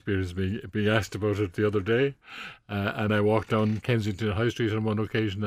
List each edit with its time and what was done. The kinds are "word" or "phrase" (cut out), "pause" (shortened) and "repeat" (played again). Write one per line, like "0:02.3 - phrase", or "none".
none